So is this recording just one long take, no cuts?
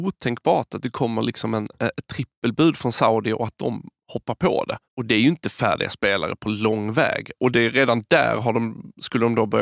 no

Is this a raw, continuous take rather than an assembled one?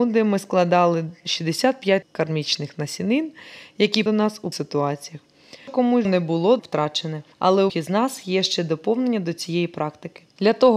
no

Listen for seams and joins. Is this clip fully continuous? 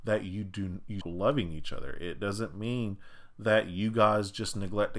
no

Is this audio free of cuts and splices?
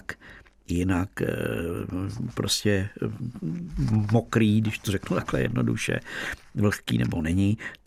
yes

